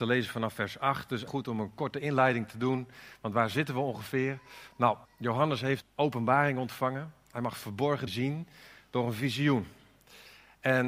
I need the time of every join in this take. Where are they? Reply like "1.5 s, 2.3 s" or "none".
1.3 s, 5.1 s, 5.8 s, 8.1 s